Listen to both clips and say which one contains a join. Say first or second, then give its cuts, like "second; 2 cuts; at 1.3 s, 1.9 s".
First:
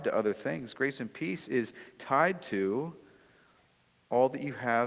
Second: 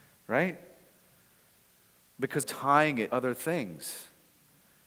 second; 2 cuts; at 2.4 s, 3.1 s